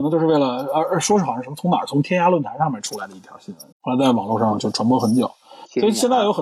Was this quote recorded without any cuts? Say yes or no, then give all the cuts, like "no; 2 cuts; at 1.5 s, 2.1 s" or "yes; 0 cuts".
no; 1 cut; at 3.7 s